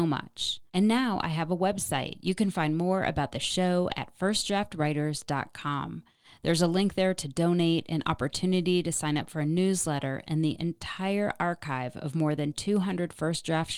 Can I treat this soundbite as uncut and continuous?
yes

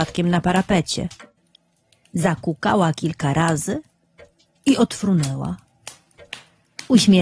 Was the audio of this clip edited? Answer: no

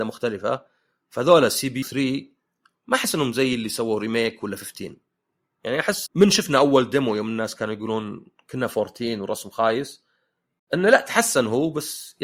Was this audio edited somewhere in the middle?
yes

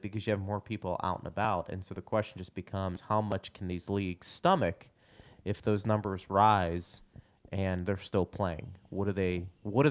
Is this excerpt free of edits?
yes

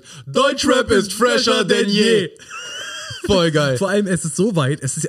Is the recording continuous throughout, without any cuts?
yes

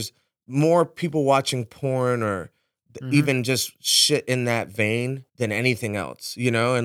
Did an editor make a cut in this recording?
yes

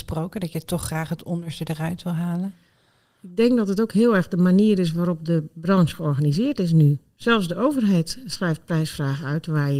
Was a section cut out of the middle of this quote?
no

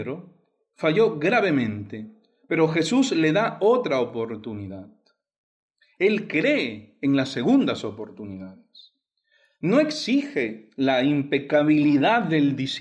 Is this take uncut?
yes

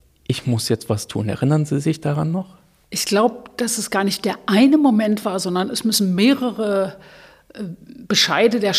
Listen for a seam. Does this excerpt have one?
no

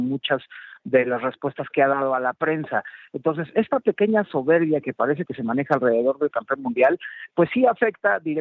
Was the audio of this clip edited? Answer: no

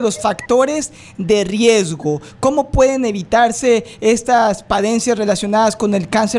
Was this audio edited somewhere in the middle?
no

